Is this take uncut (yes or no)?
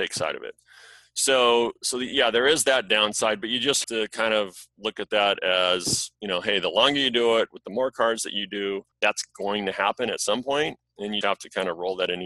no